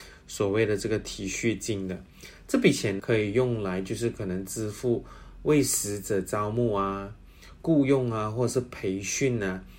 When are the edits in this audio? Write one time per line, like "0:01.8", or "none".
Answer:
0:03.0